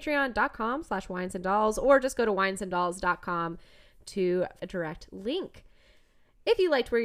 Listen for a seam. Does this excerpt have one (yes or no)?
yes